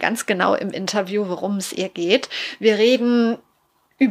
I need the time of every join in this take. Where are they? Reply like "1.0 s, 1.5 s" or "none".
none